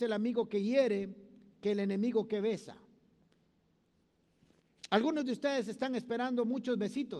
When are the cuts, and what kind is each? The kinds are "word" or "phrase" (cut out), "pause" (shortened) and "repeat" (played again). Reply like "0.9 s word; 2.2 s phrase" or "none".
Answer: none